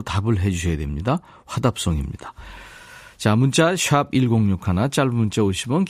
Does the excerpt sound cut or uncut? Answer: uncut